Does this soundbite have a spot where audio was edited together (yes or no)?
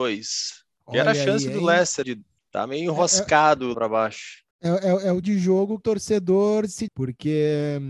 yes